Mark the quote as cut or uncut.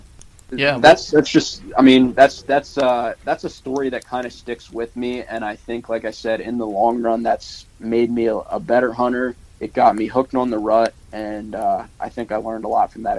cut